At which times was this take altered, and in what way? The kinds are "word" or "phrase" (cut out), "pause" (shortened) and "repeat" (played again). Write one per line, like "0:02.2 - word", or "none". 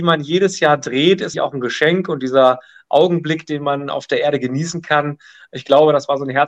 0:01.3 - word